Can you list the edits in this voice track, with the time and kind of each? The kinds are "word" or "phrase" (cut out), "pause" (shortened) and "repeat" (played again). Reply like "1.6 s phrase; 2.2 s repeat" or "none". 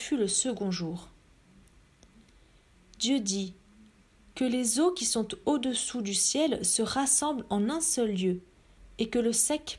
none